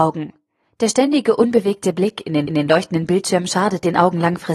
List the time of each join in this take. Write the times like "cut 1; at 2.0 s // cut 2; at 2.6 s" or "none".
cut 1; at 2.5 s